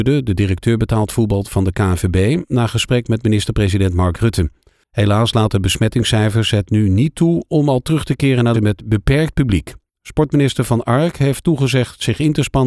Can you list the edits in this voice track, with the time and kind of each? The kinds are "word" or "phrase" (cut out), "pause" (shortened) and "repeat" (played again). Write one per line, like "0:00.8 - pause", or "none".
0:08.5 - phrase